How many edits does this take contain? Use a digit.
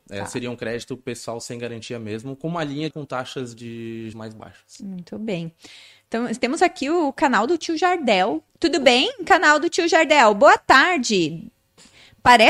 3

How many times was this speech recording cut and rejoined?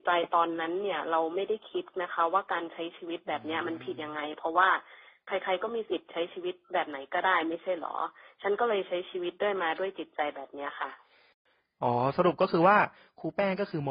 0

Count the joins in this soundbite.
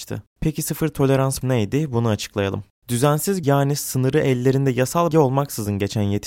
3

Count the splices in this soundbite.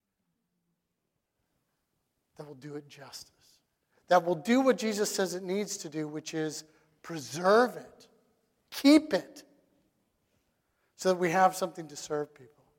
0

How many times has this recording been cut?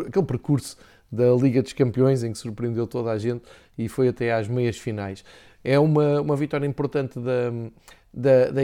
0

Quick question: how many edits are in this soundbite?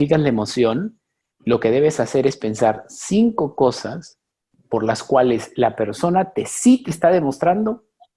0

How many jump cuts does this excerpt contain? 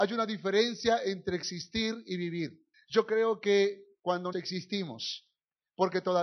2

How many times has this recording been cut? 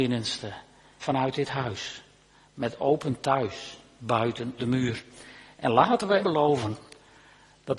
3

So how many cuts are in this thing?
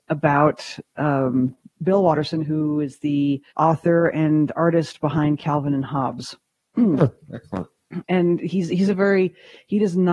1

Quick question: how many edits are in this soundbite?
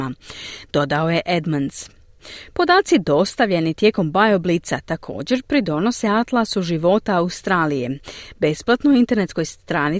0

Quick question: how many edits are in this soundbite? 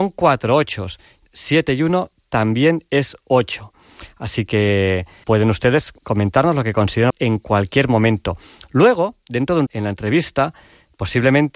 5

